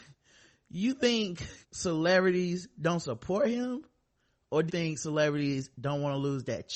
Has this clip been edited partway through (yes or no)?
yes